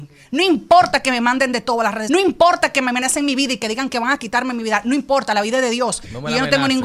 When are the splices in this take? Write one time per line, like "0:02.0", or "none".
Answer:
0:02.1